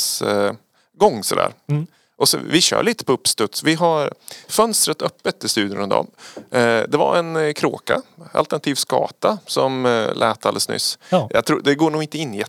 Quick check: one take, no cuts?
yes; 0 cuts

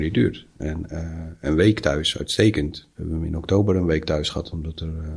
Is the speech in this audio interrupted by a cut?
yes; 1 cut; at 2.9 s

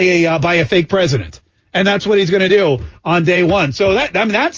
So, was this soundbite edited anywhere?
no; 0 cuts

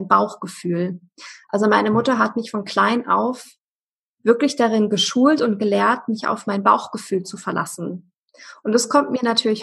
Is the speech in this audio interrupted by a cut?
no; 0 cuts

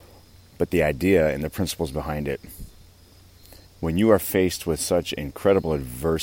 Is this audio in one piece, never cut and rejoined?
no; 1 cut; at 3.6 s

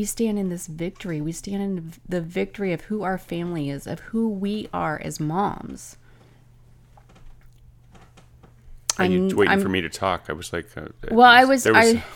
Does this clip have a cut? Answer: no; 0 cuts

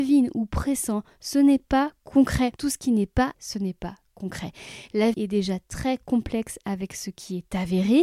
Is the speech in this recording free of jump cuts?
no; 3 cuts; at 2.6 s, 3.3 s, 5.1 s

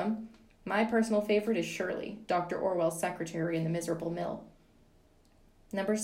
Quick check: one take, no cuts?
yes; 0 cuts

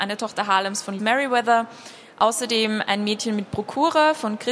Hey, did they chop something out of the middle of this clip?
yes; 1 cut; at 1.0 s

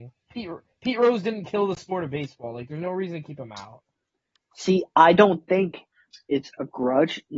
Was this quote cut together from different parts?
no; 0 cuts

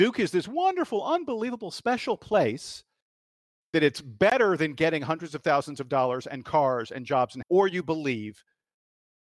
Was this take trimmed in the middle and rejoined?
yes; 1 cut; at 7.4 s

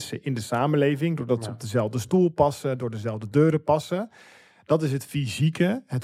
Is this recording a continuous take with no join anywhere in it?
yes; 0 cuts

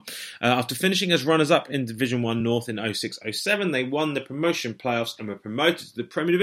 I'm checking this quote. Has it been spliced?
no; 0 cuts

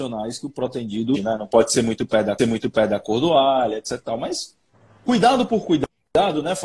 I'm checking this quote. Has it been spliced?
yes; 3 cuts; at 1.1 s, 2.4 s, 4.7 s

